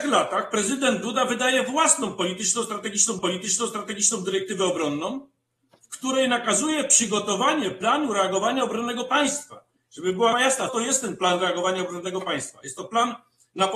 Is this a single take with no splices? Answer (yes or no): no